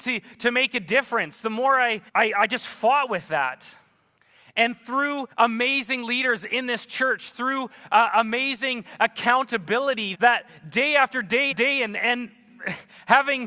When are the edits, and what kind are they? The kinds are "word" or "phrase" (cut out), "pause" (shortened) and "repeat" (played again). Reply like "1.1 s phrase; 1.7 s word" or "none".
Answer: 2.1 s pause; 4.2 s pause; 5.3 s pause; 10.1 s word; 11.5 s repeat